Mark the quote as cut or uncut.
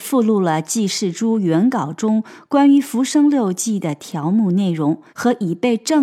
cut